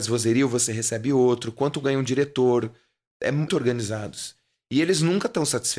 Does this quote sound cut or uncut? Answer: cut